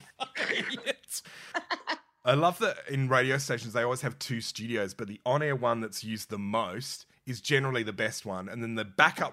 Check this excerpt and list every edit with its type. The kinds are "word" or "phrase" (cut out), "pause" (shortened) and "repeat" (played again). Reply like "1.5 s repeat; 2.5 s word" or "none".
7.1 s pause